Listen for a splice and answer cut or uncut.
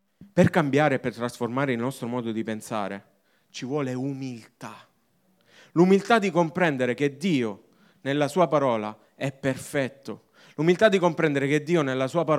uncut